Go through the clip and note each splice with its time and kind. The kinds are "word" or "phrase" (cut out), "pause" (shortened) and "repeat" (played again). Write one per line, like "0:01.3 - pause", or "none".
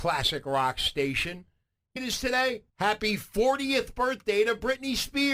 0:02.0 - phrase
0:02.7 - pause